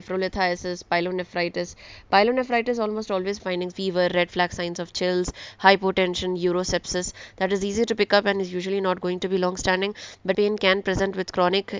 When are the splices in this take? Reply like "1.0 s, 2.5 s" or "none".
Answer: 3.4 s, 3.7 s, 10.3 s